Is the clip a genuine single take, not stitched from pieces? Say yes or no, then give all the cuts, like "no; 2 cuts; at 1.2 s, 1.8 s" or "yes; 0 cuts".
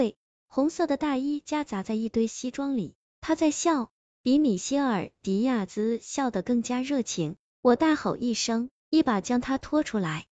yes; 0 cuts